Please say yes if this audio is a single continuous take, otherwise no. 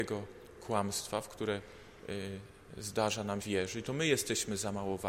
no